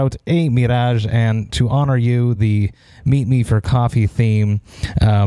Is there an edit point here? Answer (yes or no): no